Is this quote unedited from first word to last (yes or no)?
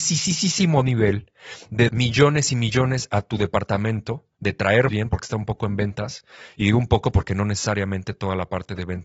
no